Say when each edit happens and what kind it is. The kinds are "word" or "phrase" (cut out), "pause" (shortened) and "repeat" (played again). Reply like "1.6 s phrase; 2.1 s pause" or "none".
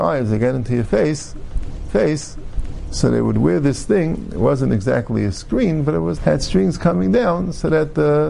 1.9 s repeat; 6.2 s word